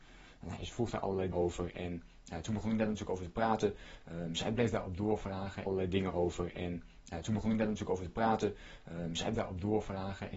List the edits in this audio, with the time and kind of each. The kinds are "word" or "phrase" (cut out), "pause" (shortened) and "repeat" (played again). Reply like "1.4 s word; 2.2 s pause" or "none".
1.3 s word; 9.3 s word